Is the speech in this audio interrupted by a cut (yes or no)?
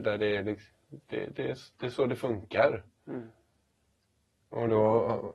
no